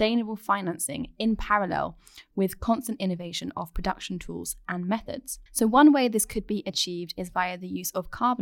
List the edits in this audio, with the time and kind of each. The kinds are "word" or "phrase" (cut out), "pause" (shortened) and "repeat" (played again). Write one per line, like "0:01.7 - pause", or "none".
0:05.5 - pause